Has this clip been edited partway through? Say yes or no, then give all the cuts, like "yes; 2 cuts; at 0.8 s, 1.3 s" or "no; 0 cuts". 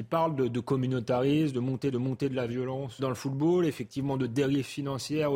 yes; 2 cuts; at 1.9 s, 3.0 s